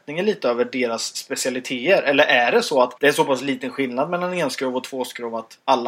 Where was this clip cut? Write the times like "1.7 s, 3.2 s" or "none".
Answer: 3.0 s